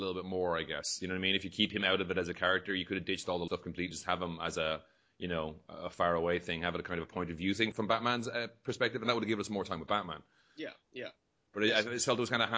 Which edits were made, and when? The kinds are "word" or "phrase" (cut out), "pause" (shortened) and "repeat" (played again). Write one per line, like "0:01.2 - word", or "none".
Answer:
0:03.5 - word
0:03.9 - word
0:07.7 - word